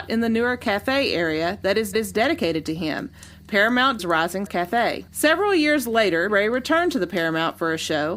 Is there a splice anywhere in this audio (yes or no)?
yes